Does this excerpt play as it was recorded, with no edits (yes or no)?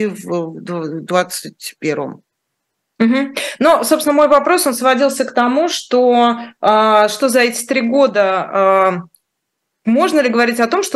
yes